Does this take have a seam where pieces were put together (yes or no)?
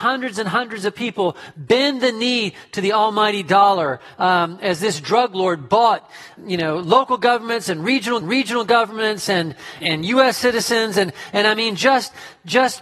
yes